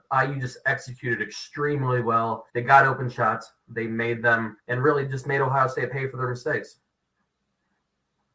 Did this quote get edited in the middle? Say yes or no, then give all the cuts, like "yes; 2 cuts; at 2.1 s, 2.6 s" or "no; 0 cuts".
yes; 2 cuts; at 2.5 s, 4.6 s